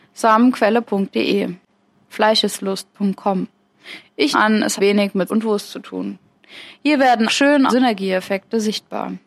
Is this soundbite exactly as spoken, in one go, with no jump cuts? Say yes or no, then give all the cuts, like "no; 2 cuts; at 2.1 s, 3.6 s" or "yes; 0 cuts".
no; 6 cuts; at 2.0 s, 4.3 s, 4.8 s, 5.3 s, 7.3 s, 7.7 s